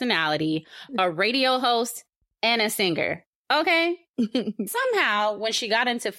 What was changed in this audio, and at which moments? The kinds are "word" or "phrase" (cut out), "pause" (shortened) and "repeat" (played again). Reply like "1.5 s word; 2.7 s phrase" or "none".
4.7 s word